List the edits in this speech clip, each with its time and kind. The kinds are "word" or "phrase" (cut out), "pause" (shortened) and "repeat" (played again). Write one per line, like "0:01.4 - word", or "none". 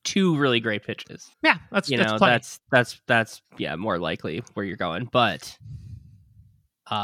0:01.3 - pause
0:03.4 - pause